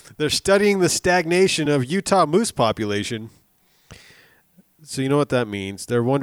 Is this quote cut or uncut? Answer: uncut